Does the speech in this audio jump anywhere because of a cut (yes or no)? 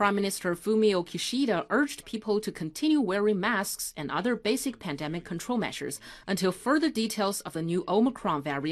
no